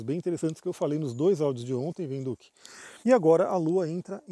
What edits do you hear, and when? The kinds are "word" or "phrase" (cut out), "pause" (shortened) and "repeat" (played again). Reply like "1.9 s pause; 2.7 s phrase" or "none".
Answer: 3.0 s pause